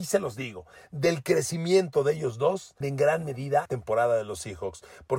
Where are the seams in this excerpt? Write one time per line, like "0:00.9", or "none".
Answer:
0:02.8
0:03.7